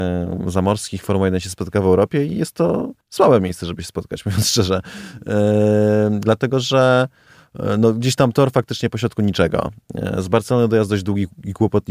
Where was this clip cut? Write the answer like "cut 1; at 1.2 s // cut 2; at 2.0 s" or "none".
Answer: cut 1; at 3.0 s